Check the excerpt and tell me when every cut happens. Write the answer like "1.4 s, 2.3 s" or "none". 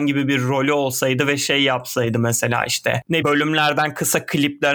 3.2 s